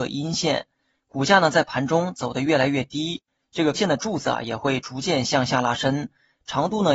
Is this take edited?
yes; 1 cut; at 3.7 s

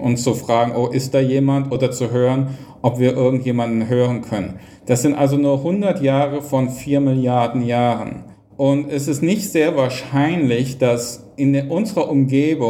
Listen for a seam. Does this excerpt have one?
yes; 1 cut; at 8.3 s

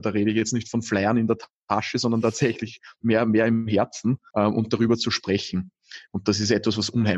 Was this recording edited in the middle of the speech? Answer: yes; 1 cut; at 4.3 s

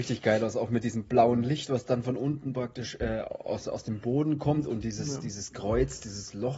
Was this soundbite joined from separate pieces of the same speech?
no; 0 cuts

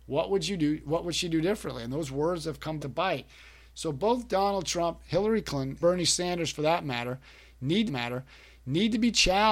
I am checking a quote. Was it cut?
yes; 3 cuts; at 2.8 s, 5.8 s, 7.9 s

